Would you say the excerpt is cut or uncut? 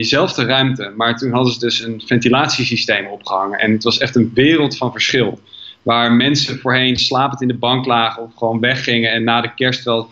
uncut